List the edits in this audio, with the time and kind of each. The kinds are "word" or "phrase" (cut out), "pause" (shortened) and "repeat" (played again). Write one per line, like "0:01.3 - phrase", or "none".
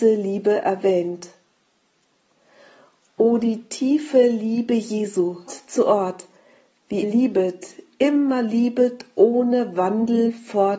0:05.5 - phrase
0:07.0 - word